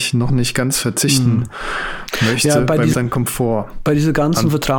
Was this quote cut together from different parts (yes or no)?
yes